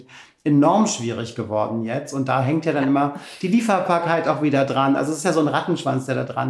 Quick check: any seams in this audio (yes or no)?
no